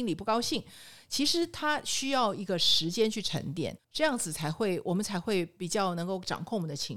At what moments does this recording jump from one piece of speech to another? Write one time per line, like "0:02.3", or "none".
0:03.8